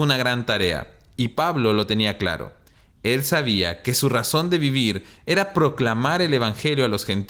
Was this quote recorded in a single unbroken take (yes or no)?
yes